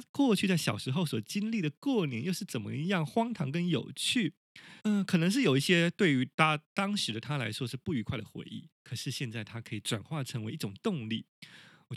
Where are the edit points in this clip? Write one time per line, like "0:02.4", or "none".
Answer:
0:04.8
0:08.7